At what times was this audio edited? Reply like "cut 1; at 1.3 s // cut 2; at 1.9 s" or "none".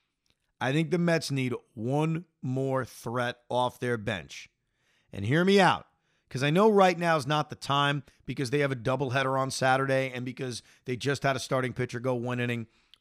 none